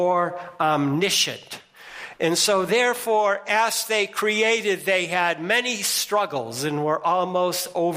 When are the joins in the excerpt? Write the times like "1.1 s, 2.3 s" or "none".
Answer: none